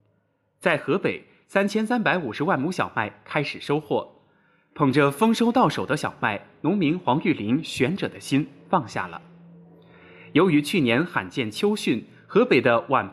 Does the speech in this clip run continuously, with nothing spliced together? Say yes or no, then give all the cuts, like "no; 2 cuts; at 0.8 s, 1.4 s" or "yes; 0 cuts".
yes; 0 cuts